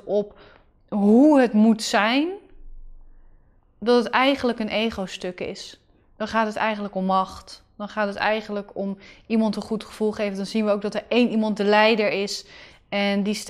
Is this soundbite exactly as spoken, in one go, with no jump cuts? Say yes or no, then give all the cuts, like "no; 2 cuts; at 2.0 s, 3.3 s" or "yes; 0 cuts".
yes; 0 cuts